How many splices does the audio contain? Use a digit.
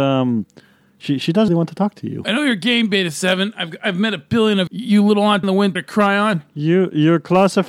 4